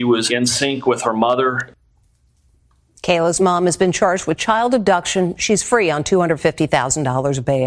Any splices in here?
no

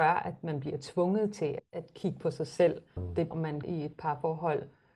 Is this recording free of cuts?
no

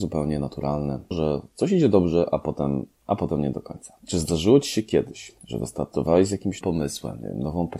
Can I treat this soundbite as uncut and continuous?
no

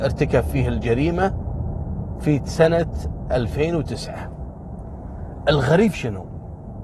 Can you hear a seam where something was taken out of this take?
yes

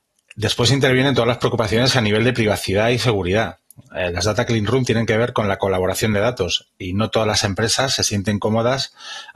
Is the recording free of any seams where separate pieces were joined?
yes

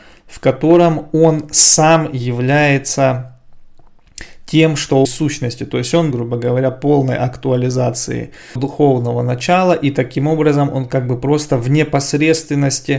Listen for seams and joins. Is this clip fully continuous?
no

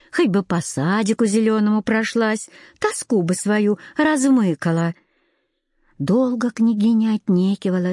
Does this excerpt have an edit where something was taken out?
no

